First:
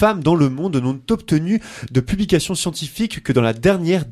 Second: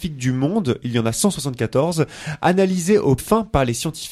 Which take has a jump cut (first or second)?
second